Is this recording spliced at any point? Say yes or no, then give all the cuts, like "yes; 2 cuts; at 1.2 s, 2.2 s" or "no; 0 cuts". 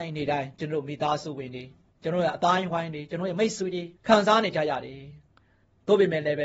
yes; 2 cuts; at 1.9 s, 4.0 s